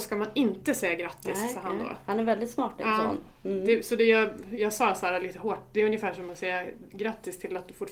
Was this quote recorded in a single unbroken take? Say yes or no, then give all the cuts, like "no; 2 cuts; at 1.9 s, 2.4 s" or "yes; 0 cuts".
yes; 0 cuts